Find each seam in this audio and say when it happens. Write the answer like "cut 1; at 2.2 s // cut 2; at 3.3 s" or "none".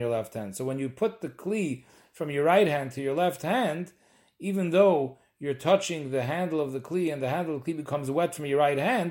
none